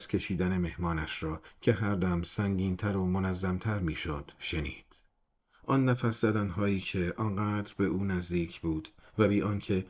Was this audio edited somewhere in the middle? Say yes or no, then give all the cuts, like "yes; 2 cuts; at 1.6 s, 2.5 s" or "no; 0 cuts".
no; 0 cuts